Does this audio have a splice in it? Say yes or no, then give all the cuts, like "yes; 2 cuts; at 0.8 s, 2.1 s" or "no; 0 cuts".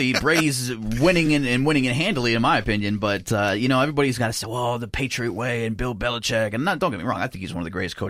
no; 0 cuts